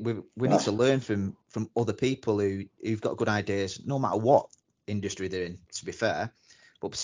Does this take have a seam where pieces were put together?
yes; 1 cut; at 1.4 s

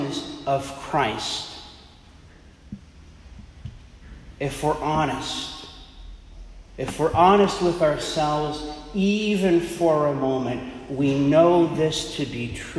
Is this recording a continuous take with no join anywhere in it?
no; 1 cut; at 6.7 s

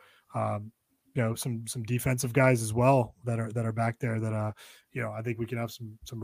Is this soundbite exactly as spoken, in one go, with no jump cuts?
yes; 0 cuts

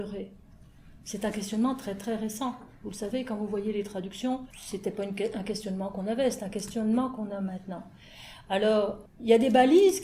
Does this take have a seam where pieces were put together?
yes; 1 cut; at 4.5 s

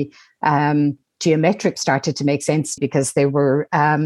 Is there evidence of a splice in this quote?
yes; 2 cuts; at 1.7 s, 2.8 s

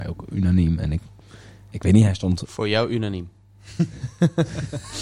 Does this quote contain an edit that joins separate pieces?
no; 0 cuts

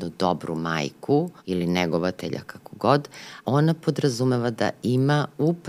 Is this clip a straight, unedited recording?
no; 2 cuts; at 1.4 s, 3.4 s

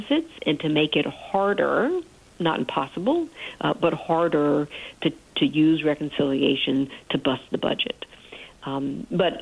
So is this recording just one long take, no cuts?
yes; 0 cuts

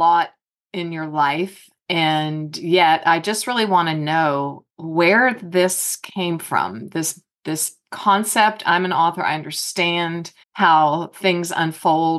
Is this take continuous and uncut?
no; 2 cuts; at 4.7 s, 10.4 s

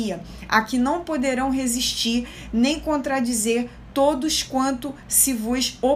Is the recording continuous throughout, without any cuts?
yes; 0 cuts

